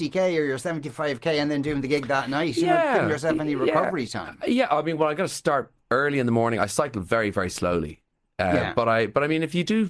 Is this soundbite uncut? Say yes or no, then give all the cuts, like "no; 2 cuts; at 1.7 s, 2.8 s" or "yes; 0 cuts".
yes; 0 cuts